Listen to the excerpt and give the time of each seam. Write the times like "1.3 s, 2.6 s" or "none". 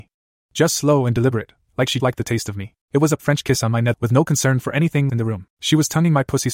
2.0 s, 2.8 s, 3.2 s, 3.9 s, 5.1 s, 5.5 s